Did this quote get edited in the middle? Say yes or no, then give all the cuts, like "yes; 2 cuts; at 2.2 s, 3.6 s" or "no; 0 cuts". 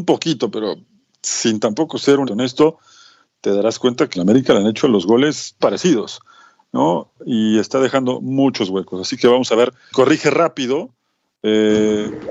yes; 4 cuts; at 2.3 s, 4.2 s, 5.6 s, 9.9 s